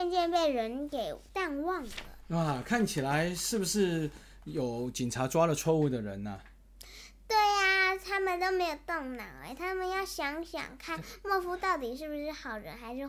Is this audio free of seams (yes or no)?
no